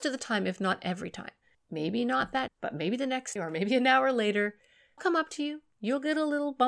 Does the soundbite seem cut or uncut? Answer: cut